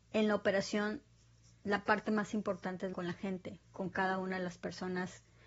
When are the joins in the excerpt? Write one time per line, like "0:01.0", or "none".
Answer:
0:02.9
0:03.6